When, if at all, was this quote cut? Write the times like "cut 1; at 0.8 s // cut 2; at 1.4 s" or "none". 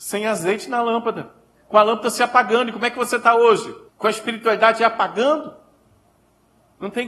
cut 1; at 3.9 s